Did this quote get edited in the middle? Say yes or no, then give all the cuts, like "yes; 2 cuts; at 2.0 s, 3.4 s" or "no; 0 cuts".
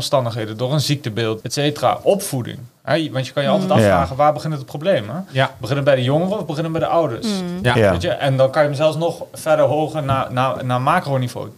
yes; 1 cut; at 1.4 s